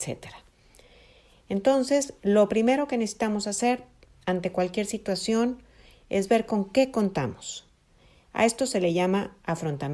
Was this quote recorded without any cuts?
yes; 0 cuts

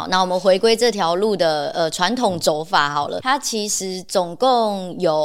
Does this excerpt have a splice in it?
yes; 1 cut; at 3.2 s

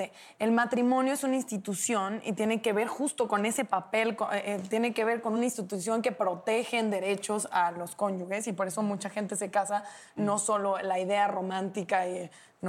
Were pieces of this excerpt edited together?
no; 0 cuts

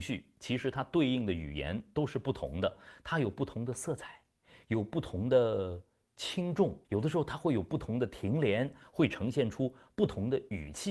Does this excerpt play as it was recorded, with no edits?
no; 1 cut; at 6.8 s

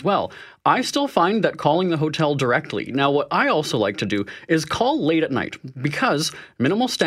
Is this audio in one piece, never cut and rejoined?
yes; 0 cuts

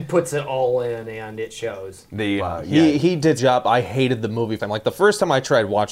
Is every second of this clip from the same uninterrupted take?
no; 3 cuts; at 2.4 s, 3.4 s, 4.6 s

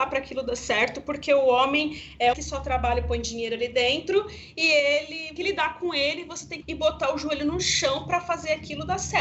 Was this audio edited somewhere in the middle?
yes; 3 cuts; at 2.3 s, 5.4 s, 6.6 s

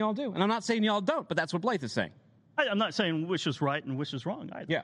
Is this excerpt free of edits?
yes; 0 cuts

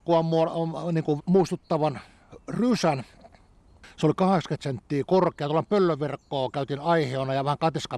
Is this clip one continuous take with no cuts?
no; 1 cut; at 1.2 s

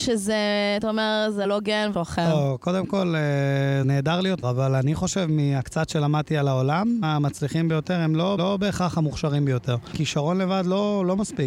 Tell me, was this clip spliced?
yes; 6 cuts; at 1.4 s, 1.9 s, 3.8 s, 4.4 s, 7.0 s, 8.4 s

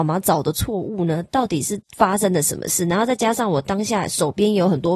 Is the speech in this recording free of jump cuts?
no; 1 cut; at 1.8 s

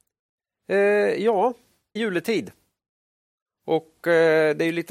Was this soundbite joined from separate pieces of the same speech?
yes; 1 cut; at 2.0 s

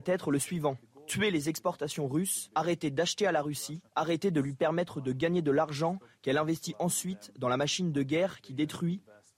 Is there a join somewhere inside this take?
yes; 1 cut; at 3.9 s

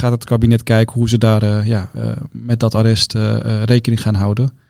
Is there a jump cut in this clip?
no; 0 cuts

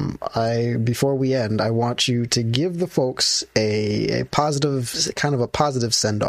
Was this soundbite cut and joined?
no; 0 cuts

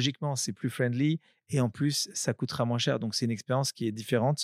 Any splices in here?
no; 0 cuts

